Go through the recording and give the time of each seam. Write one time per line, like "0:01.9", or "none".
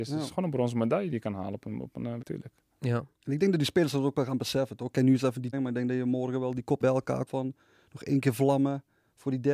0:02.2
0:05.5
0:06.8
0:07.3